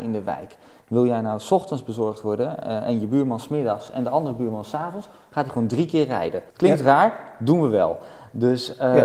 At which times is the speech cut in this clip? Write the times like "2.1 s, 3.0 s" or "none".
6.5 s